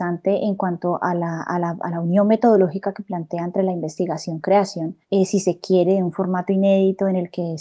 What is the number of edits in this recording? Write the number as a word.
one